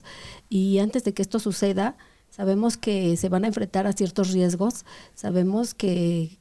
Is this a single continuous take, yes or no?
yes